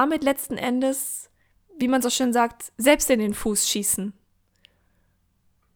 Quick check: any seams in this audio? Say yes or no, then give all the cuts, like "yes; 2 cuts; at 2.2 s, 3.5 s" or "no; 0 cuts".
no; 0 cuts